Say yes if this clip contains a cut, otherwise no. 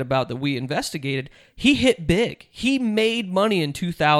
no